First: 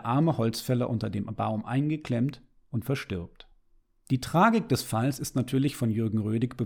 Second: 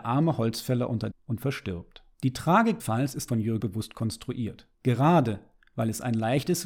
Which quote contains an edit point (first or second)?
second